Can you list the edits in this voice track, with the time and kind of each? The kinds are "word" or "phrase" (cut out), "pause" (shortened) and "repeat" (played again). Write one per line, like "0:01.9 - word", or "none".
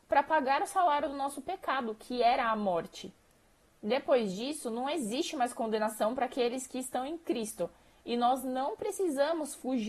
none